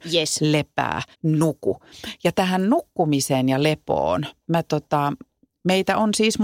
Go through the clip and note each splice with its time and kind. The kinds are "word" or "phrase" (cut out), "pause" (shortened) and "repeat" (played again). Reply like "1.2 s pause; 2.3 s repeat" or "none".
1.1 s pause